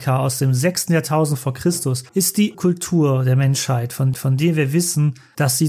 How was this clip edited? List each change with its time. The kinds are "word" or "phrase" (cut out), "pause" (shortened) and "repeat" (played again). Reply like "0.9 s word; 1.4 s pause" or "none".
2.1 s pause; 2.5 s word; 4.1 s repeat